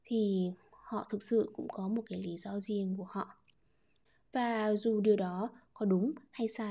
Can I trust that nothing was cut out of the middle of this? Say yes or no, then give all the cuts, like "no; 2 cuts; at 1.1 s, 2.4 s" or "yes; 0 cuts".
yes; 0 cuts